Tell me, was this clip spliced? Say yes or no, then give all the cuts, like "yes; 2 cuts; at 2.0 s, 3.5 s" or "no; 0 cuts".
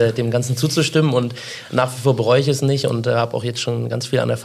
no; 0 cuts